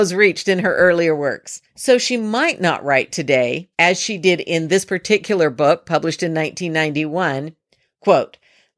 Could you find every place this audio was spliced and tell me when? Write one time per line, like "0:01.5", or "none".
0:01.7
0:03.7